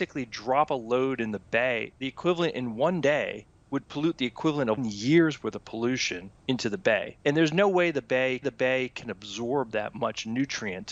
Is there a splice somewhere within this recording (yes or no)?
yes